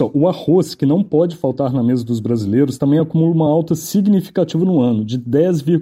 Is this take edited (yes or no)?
no